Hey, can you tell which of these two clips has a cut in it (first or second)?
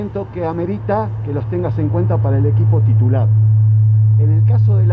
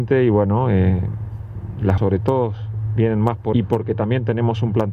second